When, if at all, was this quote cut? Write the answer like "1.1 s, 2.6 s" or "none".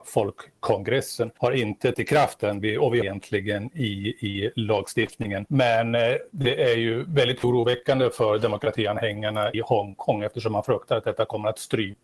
1.9 s, 3.0 s, 9.5 s